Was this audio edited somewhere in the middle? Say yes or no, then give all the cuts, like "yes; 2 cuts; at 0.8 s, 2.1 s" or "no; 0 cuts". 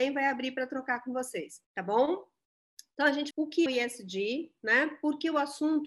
yes; 4 cuts; at 1.6 s, 2.9 s, 3.3 s, 3.7 s